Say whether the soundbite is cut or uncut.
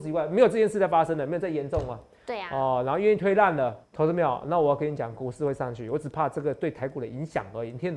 cut